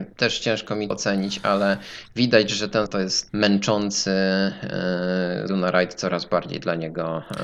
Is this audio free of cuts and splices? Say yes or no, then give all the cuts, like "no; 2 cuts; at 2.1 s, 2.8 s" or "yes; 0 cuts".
no; 4 cuts; at 0.9 s, 2.9 s, 3.3 s, 5.5 s